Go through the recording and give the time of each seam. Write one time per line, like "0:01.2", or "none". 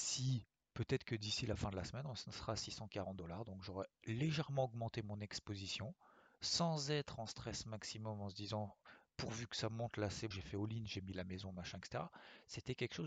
0:10.3